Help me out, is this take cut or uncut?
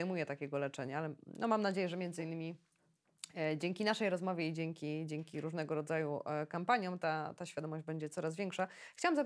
uncut